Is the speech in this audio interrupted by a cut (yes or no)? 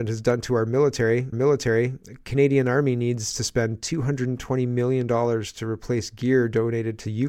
yes